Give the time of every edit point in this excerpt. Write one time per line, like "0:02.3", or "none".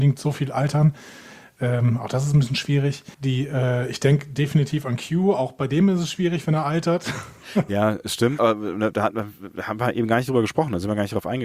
0:03.1
0:08.4

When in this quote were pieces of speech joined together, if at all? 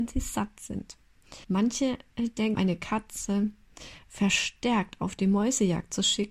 0:01.4
0:02.6

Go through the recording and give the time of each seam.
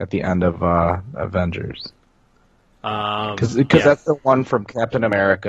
none

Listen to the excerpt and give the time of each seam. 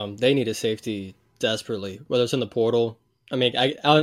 none

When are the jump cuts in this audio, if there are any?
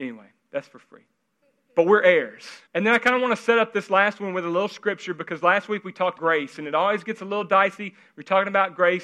0:01.4
0:02.7
0:06.2

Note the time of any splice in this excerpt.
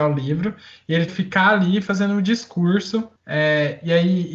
0:01.1

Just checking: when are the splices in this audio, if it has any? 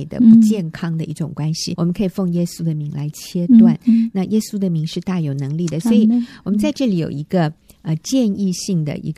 0:01.7

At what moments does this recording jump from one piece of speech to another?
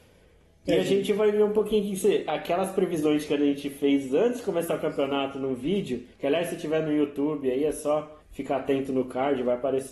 0:06.1
0:08.2

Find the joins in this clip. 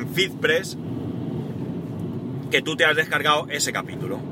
none

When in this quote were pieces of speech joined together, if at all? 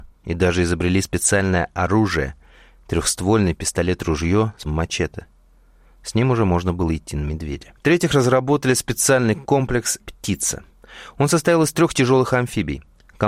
0:04.6
0:10.0

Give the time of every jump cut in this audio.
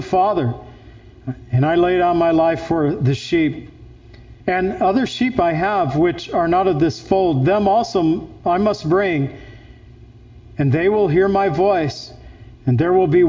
0:04.4

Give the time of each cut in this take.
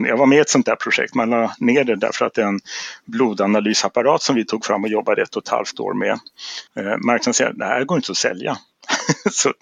0:06.7

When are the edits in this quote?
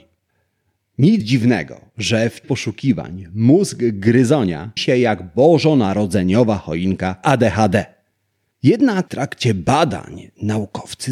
0:01.2
0:02.4
0:04.8
0:07.2
0:09.1

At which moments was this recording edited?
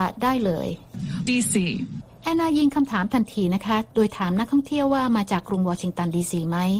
0:01.3

